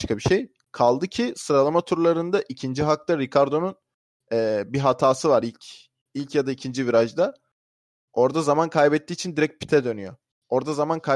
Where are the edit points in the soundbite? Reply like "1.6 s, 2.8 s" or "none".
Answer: none

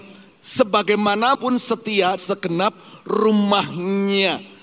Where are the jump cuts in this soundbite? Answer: 1.3 s, 2.2 s

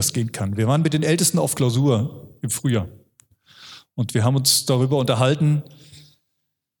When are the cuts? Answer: none

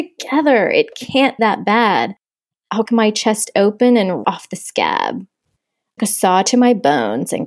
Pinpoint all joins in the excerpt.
1.4 s, 2.9 s, 4.2 s, 6.0 s

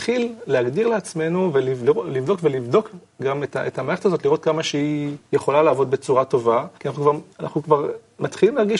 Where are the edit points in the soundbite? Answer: 5.2 s, 6.7 s, 7.3 s

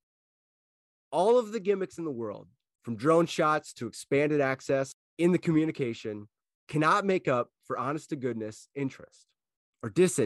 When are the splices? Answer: none

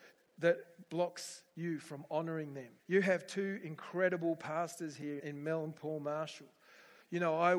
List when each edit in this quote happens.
2.8 s, 5.2 s

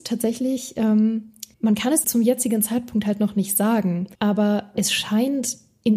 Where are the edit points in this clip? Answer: 1.5 s, 2.0 s, 4.1 s

